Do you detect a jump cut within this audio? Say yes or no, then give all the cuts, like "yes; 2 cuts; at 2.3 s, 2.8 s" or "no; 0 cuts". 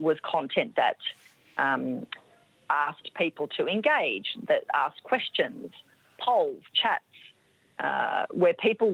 no; 0 cuts